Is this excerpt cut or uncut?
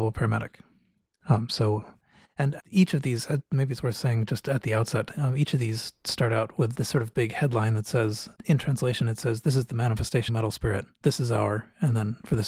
cut